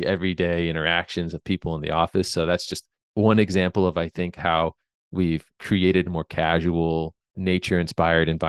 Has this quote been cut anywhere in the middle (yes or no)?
yes